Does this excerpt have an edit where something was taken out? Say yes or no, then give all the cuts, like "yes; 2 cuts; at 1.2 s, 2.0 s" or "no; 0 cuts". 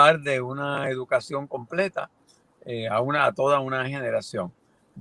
no; 0 cuts